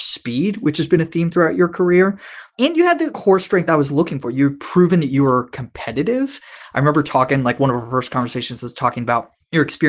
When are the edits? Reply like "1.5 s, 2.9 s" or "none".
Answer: none